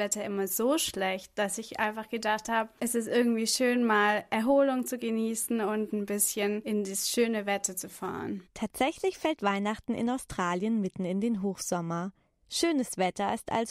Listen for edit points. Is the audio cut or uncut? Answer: uncut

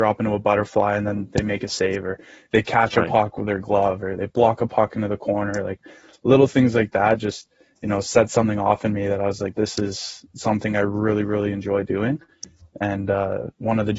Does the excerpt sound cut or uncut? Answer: uncut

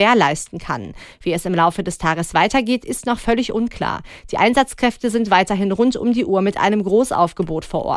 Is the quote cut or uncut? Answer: uncut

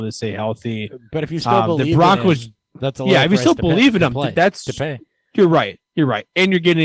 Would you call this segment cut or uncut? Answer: uncut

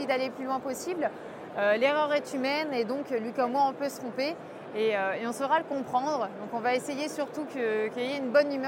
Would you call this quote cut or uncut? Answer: uncut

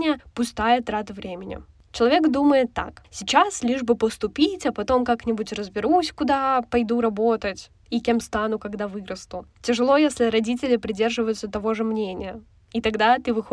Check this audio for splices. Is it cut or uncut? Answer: uncut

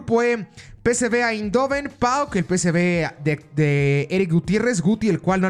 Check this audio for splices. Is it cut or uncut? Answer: uncut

